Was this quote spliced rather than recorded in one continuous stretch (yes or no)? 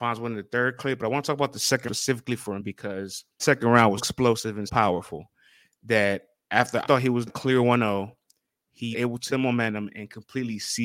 yes